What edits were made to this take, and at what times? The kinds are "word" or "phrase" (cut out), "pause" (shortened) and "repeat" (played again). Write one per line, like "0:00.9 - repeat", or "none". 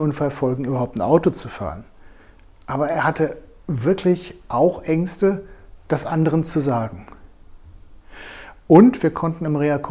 none